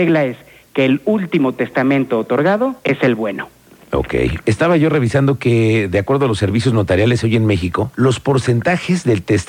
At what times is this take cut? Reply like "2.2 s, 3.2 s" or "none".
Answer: 2.8 s